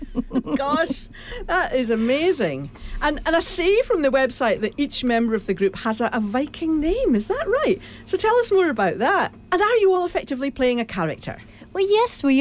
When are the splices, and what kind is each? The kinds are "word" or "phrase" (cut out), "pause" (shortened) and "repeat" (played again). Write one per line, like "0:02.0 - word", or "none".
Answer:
none